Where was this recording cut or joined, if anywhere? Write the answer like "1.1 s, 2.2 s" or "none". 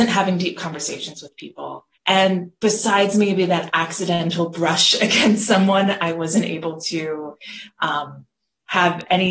2.0 s

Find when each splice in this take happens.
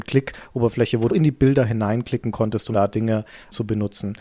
1.1 s, 2.7 s

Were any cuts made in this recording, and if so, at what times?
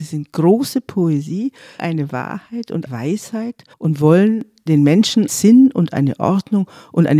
1.8 s, 2.9 s, 3.7 s, 5.3 s

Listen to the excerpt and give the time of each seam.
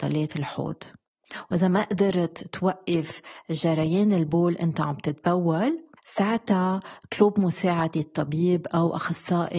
6.0 s

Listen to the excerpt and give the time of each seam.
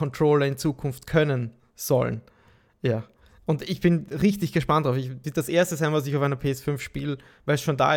5.2 s

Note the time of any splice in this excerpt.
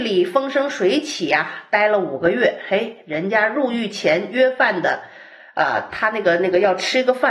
none

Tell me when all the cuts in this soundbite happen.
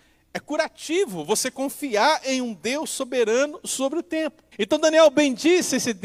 4.5 s

